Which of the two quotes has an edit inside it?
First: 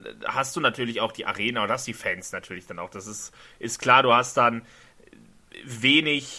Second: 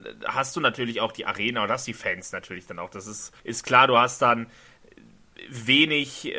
second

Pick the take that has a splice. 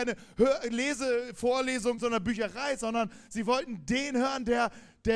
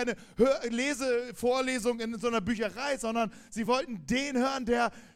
first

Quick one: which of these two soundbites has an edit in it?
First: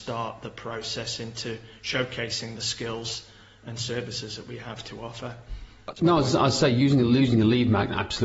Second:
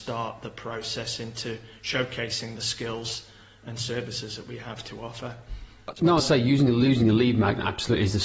second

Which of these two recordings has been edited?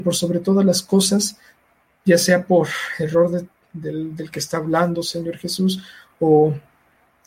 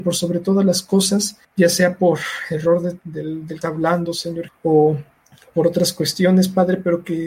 second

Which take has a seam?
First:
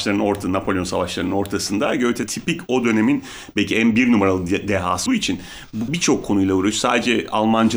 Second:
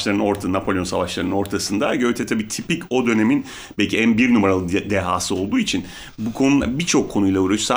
first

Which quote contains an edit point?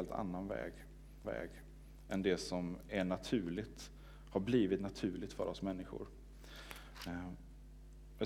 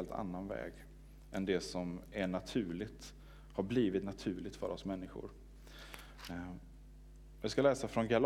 first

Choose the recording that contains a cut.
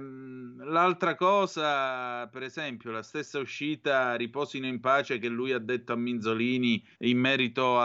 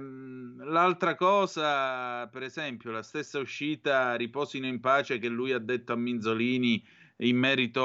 first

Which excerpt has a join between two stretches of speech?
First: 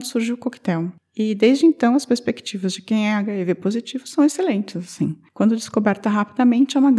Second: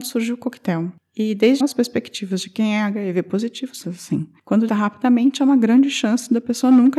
second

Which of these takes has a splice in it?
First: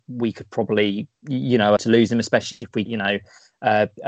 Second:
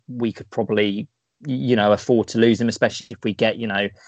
first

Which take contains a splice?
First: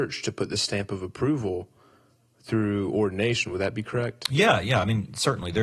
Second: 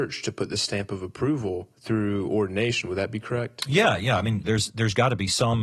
second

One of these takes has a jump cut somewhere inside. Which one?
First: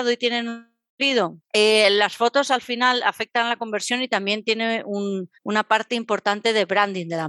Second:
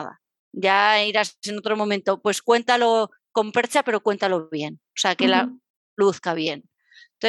first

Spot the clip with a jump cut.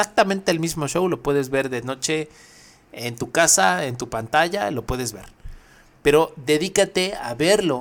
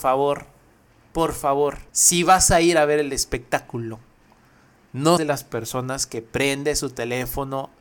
second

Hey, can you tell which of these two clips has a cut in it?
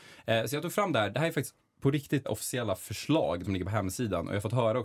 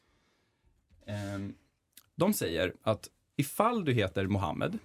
first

